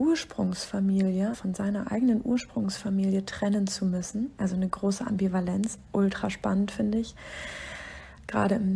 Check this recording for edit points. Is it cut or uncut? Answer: cut